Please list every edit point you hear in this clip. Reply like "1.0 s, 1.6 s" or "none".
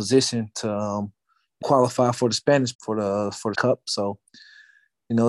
1.6 s, 2.7 s, 3.5 s